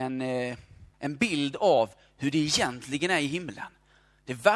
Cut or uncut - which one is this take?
cut